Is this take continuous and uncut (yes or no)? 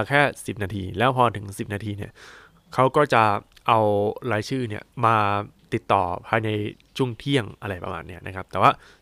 no